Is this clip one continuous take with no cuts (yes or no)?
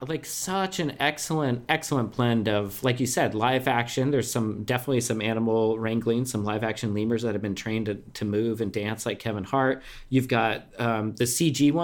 yes